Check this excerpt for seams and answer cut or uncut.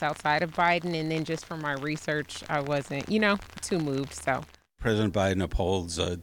uncut